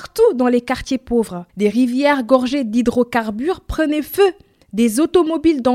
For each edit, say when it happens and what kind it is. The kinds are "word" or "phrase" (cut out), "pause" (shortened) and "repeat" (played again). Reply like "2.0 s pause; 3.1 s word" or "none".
1.5 s pause